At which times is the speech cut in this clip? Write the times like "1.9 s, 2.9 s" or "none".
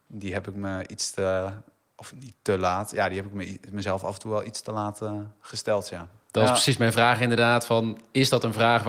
none